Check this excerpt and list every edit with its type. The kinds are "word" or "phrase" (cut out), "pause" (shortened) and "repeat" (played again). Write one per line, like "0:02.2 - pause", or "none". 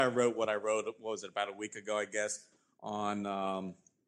none